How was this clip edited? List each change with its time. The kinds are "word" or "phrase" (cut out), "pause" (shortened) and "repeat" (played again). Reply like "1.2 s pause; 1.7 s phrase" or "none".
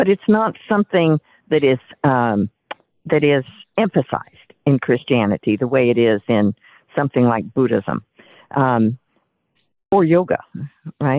none